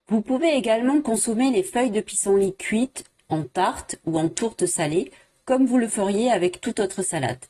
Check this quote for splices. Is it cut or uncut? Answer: uncut